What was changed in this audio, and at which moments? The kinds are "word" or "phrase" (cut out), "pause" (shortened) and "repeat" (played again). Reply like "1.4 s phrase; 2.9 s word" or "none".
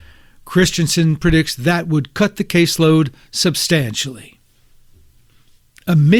none

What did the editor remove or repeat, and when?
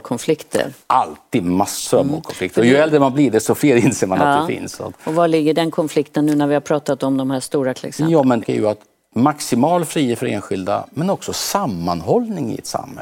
7.8 s word; 8.4 s phrase

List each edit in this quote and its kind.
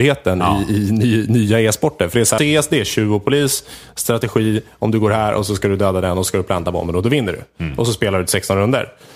2.4 s phrase

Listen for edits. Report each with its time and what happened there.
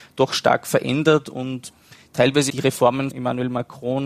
2.5 s word; 3.1 s word

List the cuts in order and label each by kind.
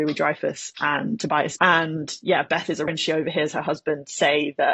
1.6 s word; 2.9 s word

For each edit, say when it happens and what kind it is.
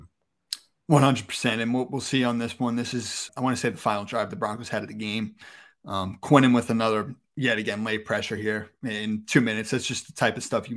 3.3 s word

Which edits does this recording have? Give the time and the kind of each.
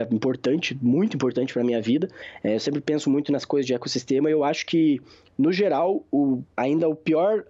none

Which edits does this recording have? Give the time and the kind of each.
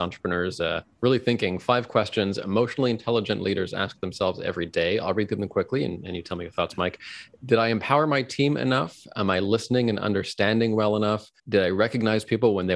11.4 s pause

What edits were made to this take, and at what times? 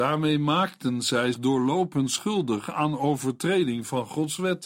1.3 s word

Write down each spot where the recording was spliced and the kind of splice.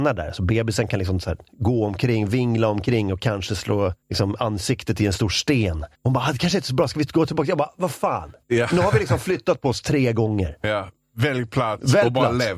4.0 s pause; 6.0 s pause

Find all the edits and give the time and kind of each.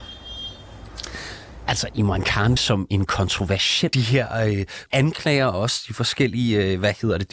2.6 s phrase; 3.9 s phrase; 4.9 s word

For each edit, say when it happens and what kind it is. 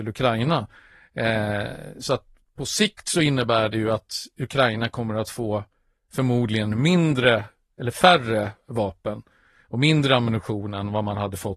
none

